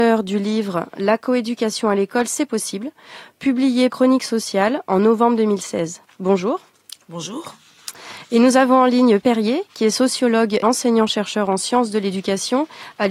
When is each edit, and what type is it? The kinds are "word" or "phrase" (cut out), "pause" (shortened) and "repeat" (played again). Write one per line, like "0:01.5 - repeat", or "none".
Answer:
0:03.9 - word
0:09.2 - word
0:10.6 - word